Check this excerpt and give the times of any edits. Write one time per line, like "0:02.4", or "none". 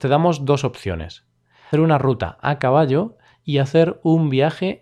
0:01.7